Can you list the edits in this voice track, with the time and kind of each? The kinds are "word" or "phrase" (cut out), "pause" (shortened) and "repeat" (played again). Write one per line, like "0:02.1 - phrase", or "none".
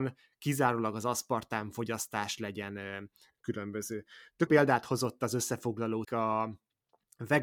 0:04.5 - word
0:06.0 - word